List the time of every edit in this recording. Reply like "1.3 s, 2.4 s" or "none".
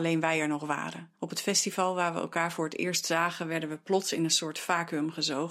1.1 s